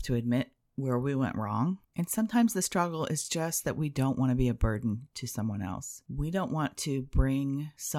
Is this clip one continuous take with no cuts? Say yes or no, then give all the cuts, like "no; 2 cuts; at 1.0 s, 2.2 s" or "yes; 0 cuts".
no; 1 cut; at 1.8 s